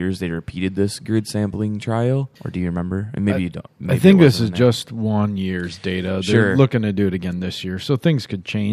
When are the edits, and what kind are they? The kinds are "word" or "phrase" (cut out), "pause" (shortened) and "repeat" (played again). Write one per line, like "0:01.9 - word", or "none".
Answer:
0:02.4 - pause